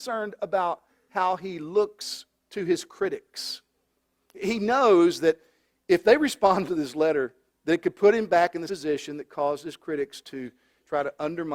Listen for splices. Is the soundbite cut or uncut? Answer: cut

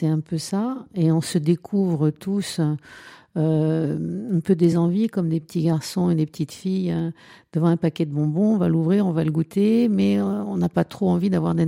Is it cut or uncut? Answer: uncut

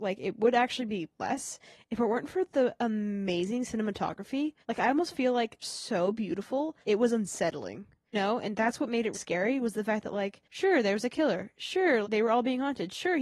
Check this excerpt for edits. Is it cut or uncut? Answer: cut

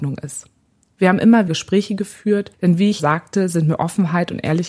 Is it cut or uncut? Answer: cut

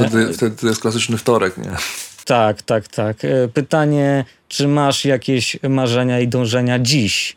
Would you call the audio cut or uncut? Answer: uncut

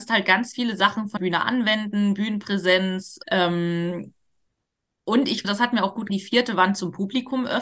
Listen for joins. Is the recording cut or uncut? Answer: cut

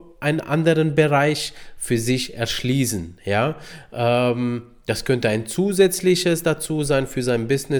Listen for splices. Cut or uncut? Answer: uncut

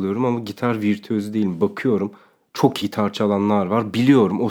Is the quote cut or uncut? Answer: cut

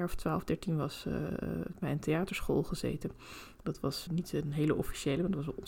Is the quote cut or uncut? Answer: cut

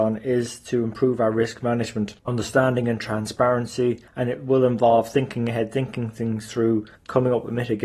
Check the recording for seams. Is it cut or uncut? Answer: cut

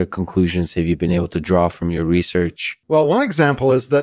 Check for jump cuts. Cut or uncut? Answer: cut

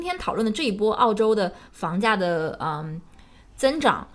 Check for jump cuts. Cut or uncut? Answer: uncut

